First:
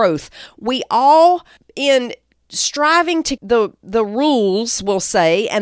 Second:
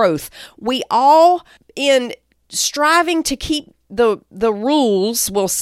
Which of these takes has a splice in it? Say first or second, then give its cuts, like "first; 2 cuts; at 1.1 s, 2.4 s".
first; 1 cut; at 3.4 s